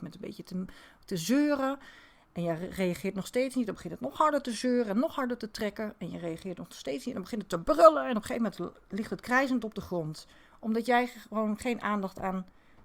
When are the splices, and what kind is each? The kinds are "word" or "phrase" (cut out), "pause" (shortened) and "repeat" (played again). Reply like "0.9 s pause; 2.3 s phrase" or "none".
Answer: none